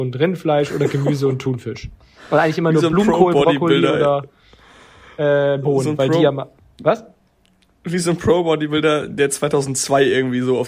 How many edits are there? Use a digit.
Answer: 0